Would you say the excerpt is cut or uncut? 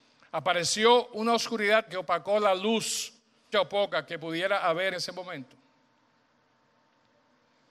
cut